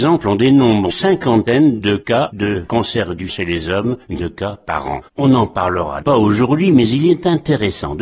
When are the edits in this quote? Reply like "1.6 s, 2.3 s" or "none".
0.9 s, 3.3 s, 4.2 s, 5.1 s, 6.0 s